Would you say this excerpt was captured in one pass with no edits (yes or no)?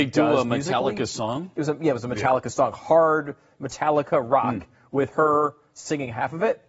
yes